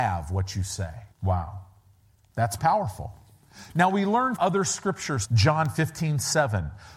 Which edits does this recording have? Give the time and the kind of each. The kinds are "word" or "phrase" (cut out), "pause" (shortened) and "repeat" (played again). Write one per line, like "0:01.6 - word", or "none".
0:01.1 - pause
0:02.6 - word
0:04.4 - word
0:05.3 - word